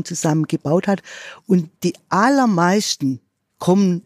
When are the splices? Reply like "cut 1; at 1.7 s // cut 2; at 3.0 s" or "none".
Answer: cut 1; at 1.8 s